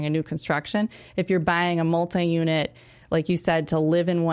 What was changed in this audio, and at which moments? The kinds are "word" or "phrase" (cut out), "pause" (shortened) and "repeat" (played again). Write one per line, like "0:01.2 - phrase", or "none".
none